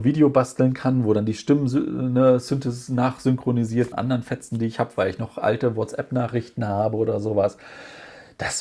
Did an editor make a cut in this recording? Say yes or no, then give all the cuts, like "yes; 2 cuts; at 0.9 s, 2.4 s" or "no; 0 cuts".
yes; 1 cut; at 3.9 s